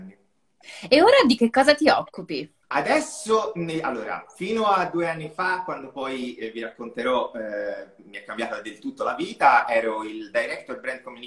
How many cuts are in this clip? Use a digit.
1